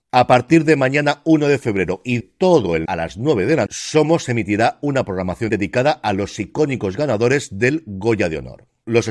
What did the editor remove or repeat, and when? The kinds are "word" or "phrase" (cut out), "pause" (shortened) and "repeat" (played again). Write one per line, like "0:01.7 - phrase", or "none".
0:02.2 - word
0:02.9 - word
0:03.7 - word
0:05.5 - word